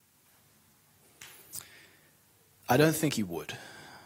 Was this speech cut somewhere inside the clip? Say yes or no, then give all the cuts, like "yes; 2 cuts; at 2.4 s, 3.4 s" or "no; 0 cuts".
no; 0 cuts